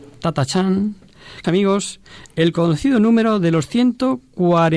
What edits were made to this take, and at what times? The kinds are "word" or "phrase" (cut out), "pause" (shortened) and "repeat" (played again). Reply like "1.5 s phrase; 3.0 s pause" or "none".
1.4 s word